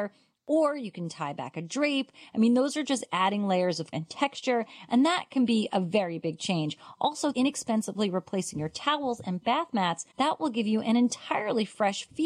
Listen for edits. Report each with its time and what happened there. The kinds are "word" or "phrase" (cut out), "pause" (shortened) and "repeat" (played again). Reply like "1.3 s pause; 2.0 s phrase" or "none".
3.9 s phrase; 7.3 s phrase; 10.1 s pause